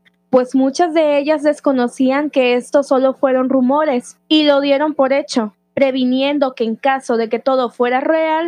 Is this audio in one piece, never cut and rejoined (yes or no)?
yes